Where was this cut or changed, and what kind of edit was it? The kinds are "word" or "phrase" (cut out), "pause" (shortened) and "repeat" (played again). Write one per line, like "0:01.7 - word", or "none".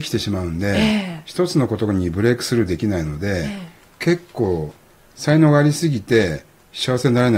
none